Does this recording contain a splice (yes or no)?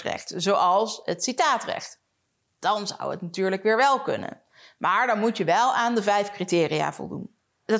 no